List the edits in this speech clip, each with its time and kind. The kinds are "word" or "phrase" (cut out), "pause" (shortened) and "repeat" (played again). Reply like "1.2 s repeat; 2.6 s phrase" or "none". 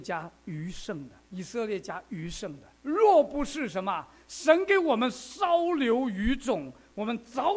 1.2 s pause; 2.8 s pause